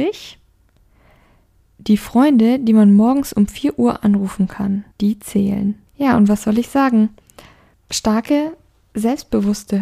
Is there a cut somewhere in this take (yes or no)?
yes